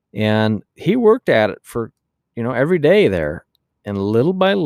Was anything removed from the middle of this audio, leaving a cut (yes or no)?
no